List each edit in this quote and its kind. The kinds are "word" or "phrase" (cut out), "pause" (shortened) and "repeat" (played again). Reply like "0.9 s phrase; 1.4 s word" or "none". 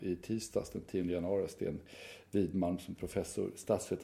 none